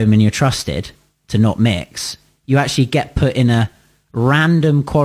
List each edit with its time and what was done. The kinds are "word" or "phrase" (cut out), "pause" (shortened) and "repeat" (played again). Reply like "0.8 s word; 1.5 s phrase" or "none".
none